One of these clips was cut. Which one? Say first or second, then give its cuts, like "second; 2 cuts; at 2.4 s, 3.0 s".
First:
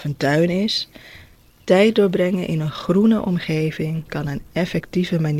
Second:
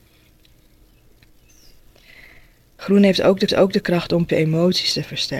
second; 2 cuts; at 3.5 s, 4.3 s